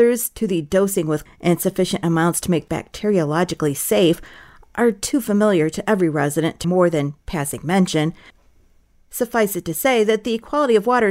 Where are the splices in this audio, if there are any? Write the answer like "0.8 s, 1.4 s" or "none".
1.3 s, 2.7 s, 6.6 s